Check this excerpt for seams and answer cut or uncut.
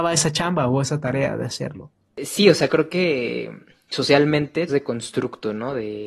cut